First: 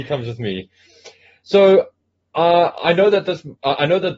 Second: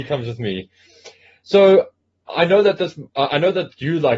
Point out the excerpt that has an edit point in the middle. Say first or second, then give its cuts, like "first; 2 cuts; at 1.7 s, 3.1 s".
second; 1 cut; at 2.3 s